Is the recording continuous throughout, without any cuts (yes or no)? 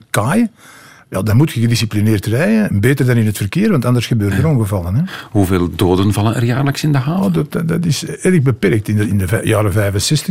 yes